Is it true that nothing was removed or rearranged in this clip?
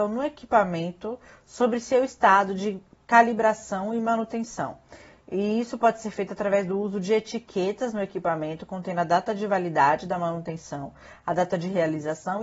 yes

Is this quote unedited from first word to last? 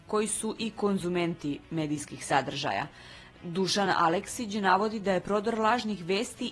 yes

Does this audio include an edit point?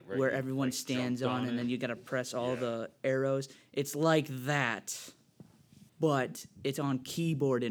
yes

